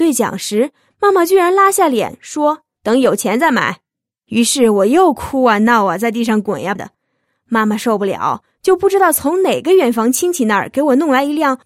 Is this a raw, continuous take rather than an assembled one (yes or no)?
no